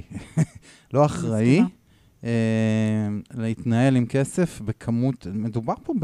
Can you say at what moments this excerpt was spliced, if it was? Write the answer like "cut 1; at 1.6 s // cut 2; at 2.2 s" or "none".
none

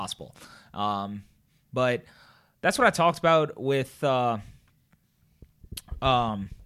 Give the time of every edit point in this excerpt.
none

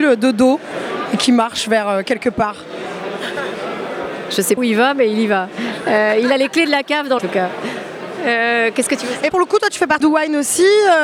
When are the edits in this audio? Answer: cut 1; at 4.6 s // cut 2; at 7.2 s // cut 3; at 9.3 s // cut 4; at 10.0 s

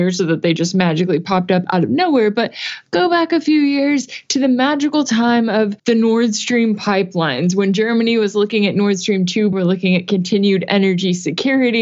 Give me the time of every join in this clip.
cut 1; at 5.8 s // cut 2; at 9.5 s

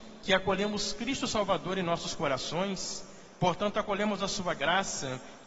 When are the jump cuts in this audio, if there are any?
none

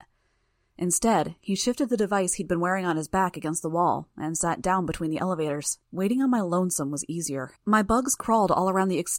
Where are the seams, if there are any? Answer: cut 1; at 5.8 s // cut 2; at 7.6 s

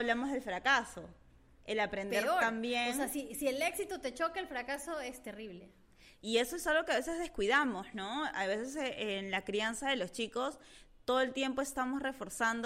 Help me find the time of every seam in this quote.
none

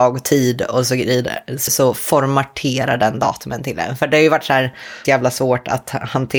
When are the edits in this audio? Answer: cut 1; at 1.7 s // cut 2; at 5.0 s

